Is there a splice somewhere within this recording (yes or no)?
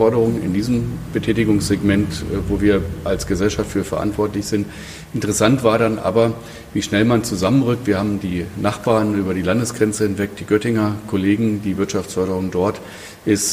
yes